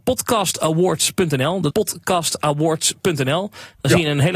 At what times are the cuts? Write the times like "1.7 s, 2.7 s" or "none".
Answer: 1.7 s